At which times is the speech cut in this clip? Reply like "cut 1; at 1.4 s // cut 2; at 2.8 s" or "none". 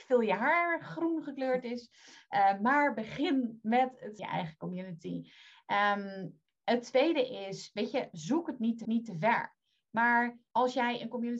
cut 1; at 4.2 s // cut 2; at 8.8 s // cut 3; at 10.5 s